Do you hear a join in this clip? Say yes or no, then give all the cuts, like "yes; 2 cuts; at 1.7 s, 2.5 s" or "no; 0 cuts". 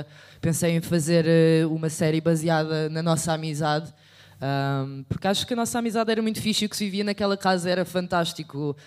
no; 0 cuts